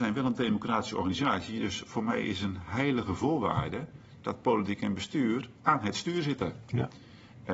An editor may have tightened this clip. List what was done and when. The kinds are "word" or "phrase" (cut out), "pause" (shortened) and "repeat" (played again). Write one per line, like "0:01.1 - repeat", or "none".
0:05.6 - pause